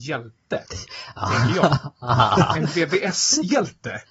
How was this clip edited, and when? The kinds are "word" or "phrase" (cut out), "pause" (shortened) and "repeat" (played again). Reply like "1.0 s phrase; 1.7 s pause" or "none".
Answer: none

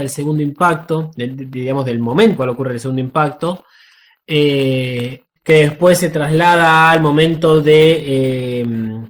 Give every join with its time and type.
2.4 s phrase; 5.4 s word

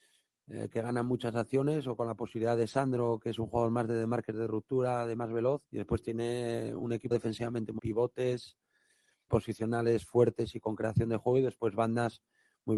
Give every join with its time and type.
5.7 s pause; 7.1 s word; 7.8 s word; 9.3 s word

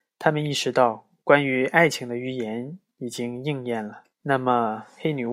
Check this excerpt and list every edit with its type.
4.1 s pause

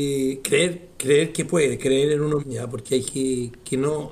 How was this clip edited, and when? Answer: 2.4 s word; 3.0 s word

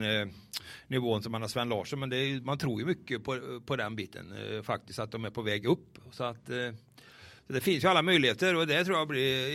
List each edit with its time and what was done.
7.4 s pause

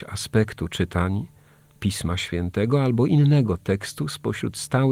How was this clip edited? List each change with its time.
none

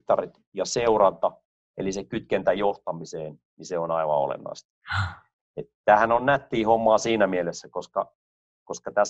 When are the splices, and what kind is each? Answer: none

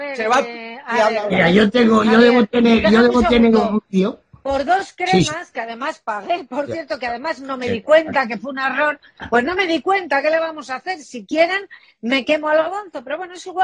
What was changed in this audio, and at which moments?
none

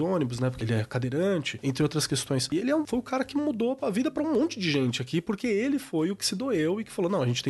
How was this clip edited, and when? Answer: none

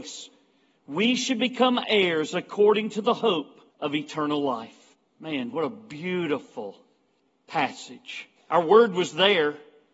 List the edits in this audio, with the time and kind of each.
3.7 s pause; 4.9 s pause; 8.4 s pause

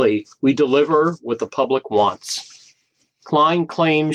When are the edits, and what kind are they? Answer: none

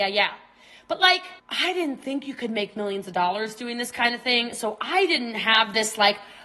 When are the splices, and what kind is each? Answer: 1.4 s pause

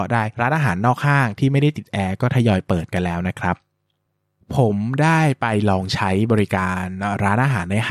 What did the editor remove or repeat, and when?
none

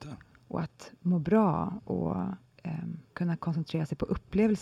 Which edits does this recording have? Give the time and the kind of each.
1.0 s pause; 3.1 s pause

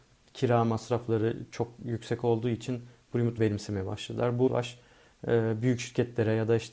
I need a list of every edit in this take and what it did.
3.4 s word; 4.5 s word

